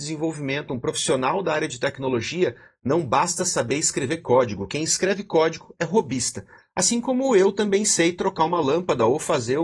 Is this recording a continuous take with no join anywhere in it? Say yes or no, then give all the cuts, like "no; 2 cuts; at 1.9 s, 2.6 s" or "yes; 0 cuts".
yes; 0 cuts